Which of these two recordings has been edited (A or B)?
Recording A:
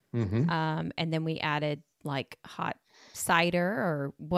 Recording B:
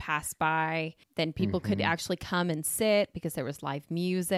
B